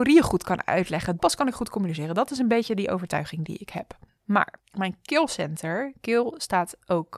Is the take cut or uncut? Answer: cut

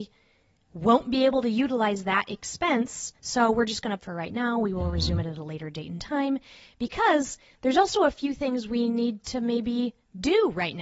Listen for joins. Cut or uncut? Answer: cut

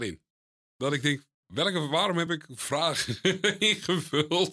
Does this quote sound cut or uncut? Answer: uncut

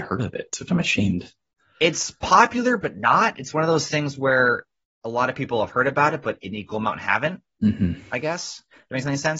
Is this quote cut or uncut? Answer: uncut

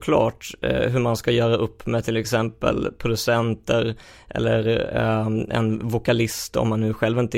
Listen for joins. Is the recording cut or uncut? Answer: uncut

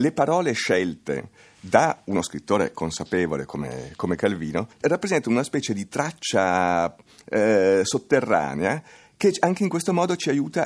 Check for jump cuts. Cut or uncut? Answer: uncut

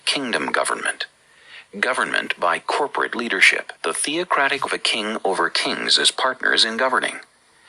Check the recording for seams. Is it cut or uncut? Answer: cut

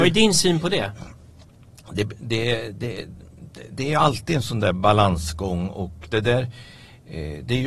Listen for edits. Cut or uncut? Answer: uncut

